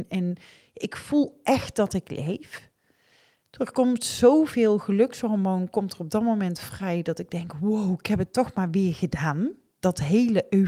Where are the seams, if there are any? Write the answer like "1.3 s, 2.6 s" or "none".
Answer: none

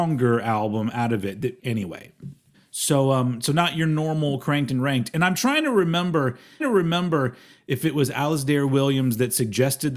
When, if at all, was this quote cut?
1.6 s, 2.5 s, 6.6 s

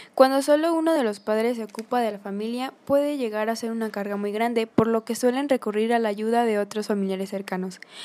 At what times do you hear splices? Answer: none

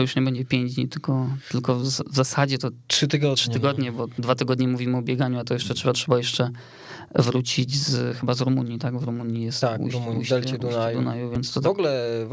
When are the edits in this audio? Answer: 5.9 s

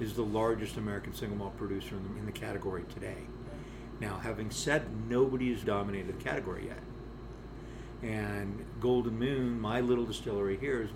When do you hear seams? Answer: 2.1 s, 4.9 s, 5.6 s

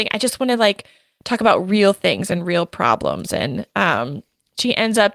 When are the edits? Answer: none

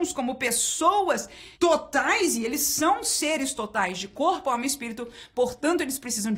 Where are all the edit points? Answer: 1.5 s

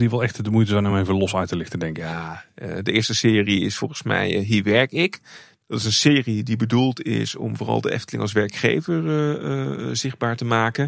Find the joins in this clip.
none

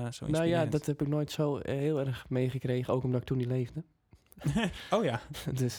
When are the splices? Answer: none

